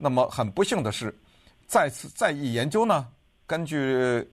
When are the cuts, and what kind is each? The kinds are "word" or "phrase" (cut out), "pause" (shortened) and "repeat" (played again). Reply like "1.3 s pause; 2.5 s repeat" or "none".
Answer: none